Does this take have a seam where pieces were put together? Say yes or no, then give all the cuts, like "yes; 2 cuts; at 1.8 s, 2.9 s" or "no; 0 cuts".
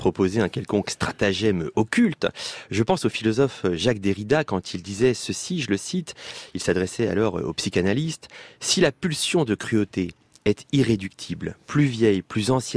no; 0 cuts